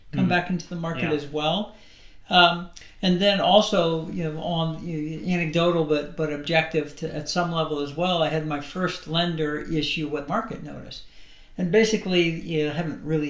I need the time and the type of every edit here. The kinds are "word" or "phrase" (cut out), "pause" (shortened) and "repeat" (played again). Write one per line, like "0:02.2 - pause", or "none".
0:10.3 - phrase